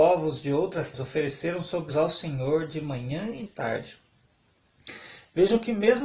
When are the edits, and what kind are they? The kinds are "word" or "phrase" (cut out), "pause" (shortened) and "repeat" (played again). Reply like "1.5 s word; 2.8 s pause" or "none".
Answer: 0.9 s word; 1.9 s phrase; 3.5 s word